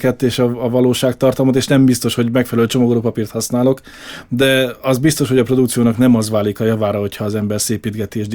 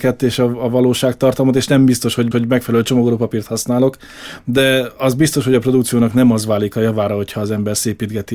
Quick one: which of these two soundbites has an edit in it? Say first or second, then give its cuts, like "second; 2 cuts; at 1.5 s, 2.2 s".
second; 1 cut; at 2.3 s